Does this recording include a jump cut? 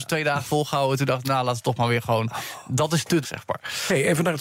yes; 1 cut; at 3.2 s

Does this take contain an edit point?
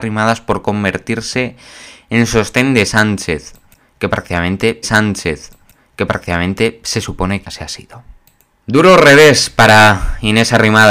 yes; 2 cuts; at 4.8 s, 7.4 s

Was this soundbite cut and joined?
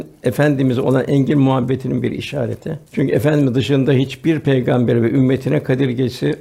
yes; 1 cut; at 2.9 s

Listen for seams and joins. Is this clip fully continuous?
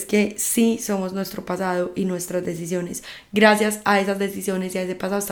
yes; 0 cuts

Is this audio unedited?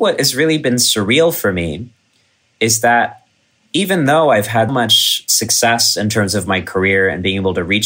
no; 1 cut; at 4.7 s

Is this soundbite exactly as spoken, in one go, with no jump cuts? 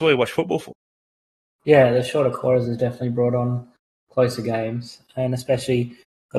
yes; 0 cuts

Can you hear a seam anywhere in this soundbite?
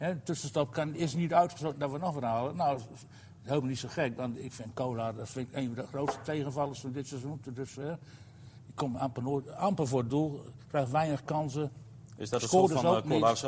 no; 0 cuts

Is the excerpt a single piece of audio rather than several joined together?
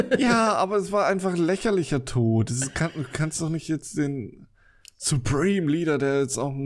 yes; 0 cuts

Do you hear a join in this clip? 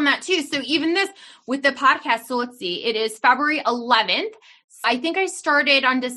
yes; 1 cut; at 4.8 s

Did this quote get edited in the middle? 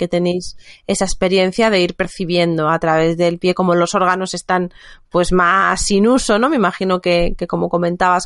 no; 0 cuts

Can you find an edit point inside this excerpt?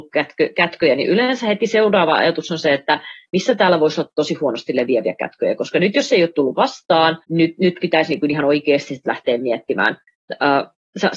yes; 1 cut; at 7.2 s

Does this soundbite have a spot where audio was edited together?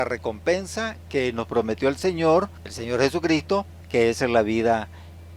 yes; 1 cut; at 2.6 s

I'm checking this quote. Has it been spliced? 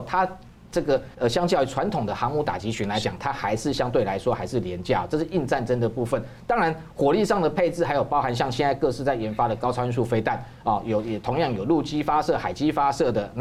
yes; 1 cut; at 1.1 s

